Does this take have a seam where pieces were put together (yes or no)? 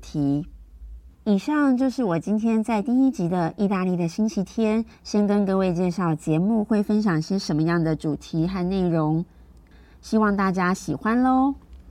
yes